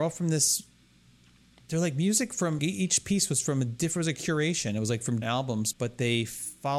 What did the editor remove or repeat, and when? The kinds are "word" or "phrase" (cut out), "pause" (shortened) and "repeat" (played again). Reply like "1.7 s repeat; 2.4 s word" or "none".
2.6 s word; 5.2 s word; 5.7 s word

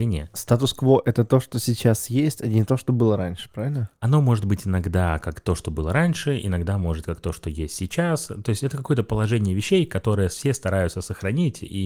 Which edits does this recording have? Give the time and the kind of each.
none

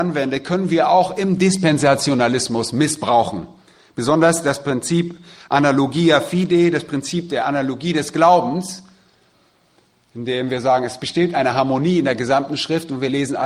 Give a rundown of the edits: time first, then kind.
none

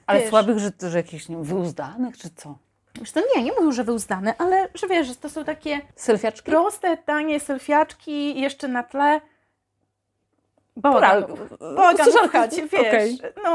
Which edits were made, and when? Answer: 5.9 s pause

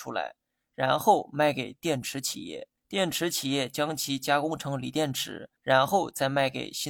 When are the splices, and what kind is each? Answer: 2.8 s pause; 5.6 s pause

